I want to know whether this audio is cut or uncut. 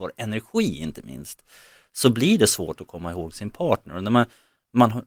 uncut